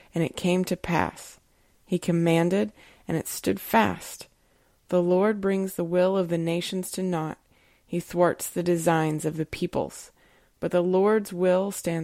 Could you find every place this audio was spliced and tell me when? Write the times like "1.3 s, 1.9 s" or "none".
none